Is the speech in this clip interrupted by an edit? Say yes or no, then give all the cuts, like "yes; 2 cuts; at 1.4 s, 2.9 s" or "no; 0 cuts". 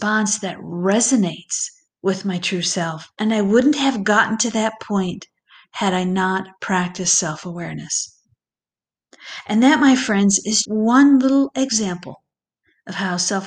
yes; 2 cuts; at 3.1 s, 10.6 s